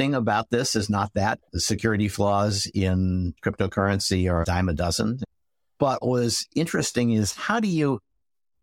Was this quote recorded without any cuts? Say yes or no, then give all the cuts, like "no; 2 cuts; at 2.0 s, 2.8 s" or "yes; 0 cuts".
no; 3 cuts; at 1.4 s, 4.4 s, 6.0 s